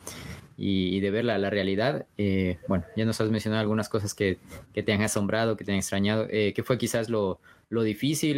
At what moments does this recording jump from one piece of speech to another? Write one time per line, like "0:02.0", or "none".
none